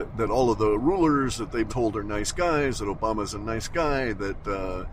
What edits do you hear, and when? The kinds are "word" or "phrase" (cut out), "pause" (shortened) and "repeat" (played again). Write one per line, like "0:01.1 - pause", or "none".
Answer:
0:01.7 - word